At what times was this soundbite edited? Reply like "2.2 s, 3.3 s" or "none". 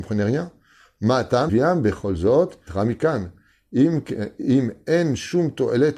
1.5 s, 2.7 s

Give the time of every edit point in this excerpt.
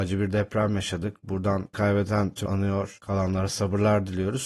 1.7 s, 2.5 s

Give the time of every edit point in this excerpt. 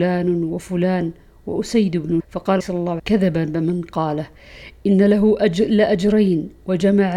2.2 s, 2.6 s, 3.0 s

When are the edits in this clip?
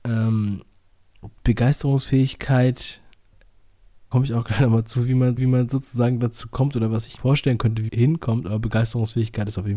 4.1 s, 5.4 s, 7.2 s, 7.9 s

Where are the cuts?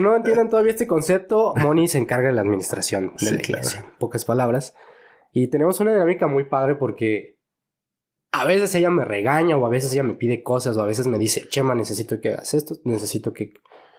none

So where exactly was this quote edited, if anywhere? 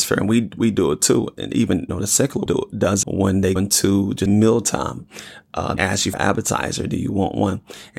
1.9 s, 2.5 s, 3.0 s, 3.6 s, 4.3 s, 5.8 s, 6.1 s

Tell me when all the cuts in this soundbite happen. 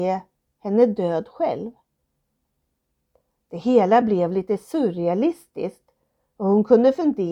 none

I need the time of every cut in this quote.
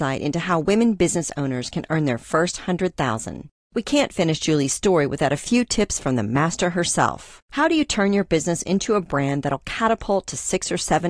7.4 s

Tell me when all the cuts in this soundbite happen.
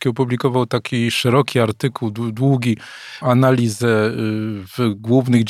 3.2 s

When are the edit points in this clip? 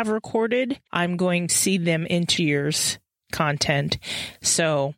1.5 s, 2.4 s

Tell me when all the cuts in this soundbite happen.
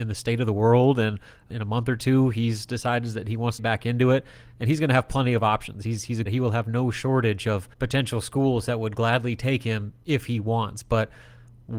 1.5 s, 3.6 s, 6.3 s, 7.7 s

